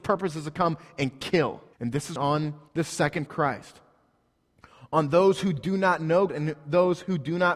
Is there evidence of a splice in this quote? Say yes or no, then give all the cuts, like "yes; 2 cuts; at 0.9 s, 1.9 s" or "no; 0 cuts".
yes; 5 cuts; at 1.7 s, 2.2 s, 2.7 s, 3.3 s, 6.3 s